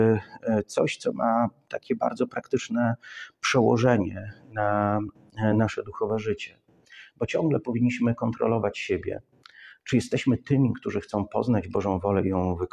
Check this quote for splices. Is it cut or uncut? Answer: uncut